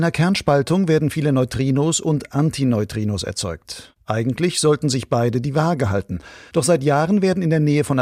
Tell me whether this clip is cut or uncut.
uncut